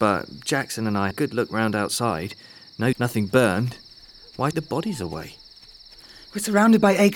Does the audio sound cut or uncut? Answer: cut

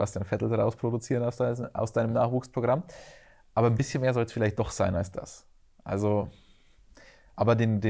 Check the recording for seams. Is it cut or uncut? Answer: uncut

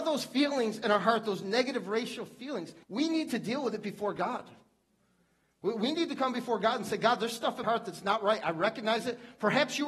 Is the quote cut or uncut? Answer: cut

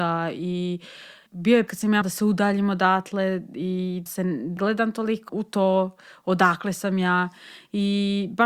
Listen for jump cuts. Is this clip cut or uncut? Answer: cut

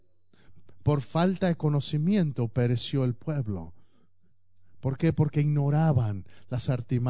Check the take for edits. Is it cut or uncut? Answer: uncut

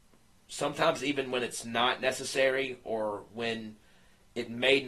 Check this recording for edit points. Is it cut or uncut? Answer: uncut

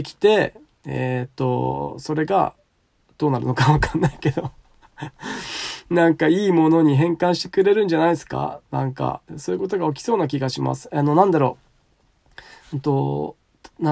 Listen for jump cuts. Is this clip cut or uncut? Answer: cut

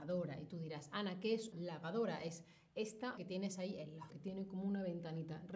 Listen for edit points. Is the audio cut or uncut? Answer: cut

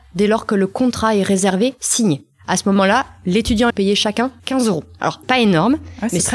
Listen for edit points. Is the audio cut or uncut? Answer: cut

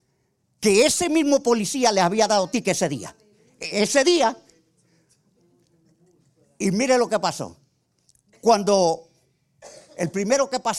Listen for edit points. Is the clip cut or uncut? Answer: uncut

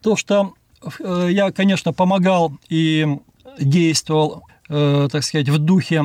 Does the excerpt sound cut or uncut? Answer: cut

